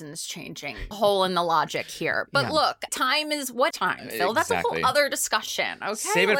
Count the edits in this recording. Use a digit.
3